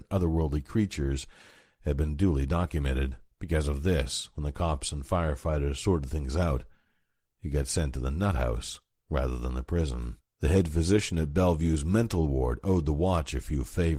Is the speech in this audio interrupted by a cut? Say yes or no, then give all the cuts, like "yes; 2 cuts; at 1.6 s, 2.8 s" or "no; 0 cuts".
yes; 2 cuts; at 3.3 s, 10.2 s